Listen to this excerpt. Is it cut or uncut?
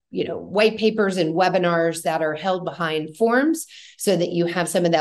uncut